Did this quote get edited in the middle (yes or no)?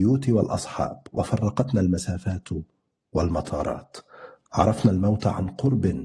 no